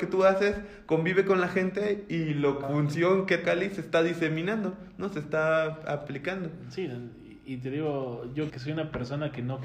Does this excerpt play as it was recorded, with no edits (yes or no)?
no